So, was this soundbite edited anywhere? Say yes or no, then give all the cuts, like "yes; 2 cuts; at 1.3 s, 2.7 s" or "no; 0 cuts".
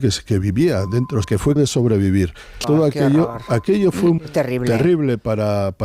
yes; 4 cuts; at 1.2 s, 1.6 s, 2.6 s, 4.2 s